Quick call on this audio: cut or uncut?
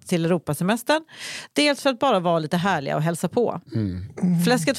uncut